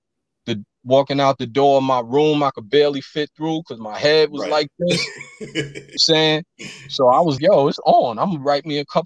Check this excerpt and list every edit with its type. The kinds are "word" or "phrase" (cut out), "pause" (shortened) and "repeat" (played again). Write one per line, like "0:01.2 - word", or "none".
0:06.0 - phrase
0:07.4 - word

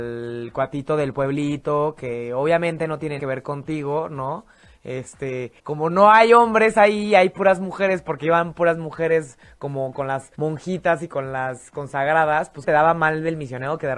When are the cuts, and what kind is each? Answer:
0:03.2 - word
0:05.6 - pause
0:10.3 - pause
0:12.6 - word

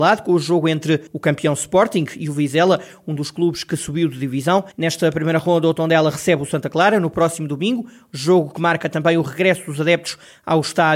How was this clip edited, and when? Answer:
0:01.1 - pause
0:04.7 - pause

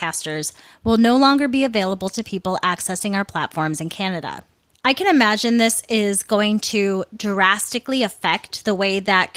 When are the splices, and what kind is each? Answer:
none

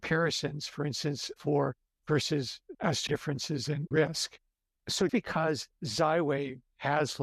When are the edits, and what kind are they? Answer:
0:02.0 - word
0:02.7 - word
0:03.1 - word
0:03.9 - word
0:05.1 - word

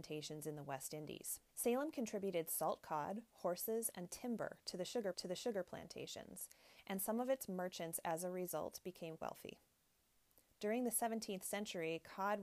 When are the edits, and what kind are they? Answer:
0:01.5 - pause
0:05.1 - repeat
0:09.2 - word

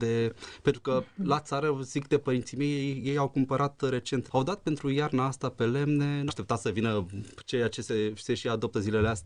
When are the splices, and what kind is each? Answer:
0:04.3 - word
0:06.3 - word

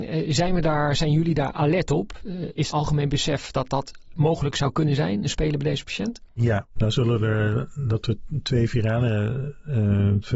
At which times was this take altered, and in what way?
0:02.7 - phrase

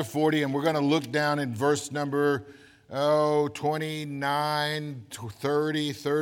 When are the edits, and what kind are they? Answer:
none

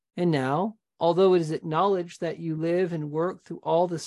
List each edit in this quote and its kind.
none

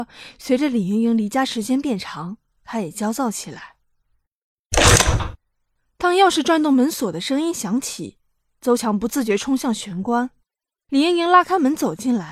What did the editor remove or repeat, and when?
none

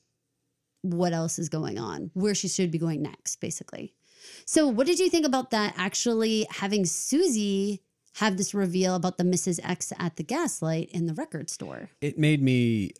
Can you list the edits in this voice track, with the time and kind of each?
none

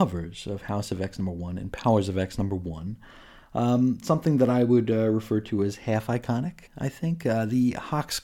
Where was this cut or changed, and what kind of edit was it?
0:06.7 - pause

